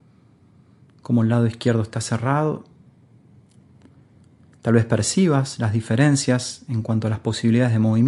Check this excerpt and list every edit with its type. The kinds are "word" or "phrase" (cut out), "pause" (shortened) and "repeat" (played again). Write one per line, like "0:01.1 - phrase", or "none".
none